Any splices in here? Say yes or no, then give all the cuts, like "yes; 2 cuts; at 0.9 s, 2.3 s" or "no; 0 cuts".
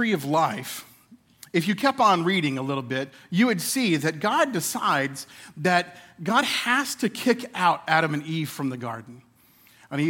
no; 0 cuts